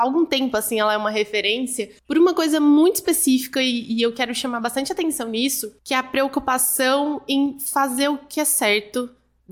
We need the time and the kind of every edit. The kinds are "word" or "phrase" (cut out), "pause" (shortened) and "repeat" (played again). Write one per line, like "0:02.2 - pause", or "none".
0:02.0 - pause
0:05.8 - pause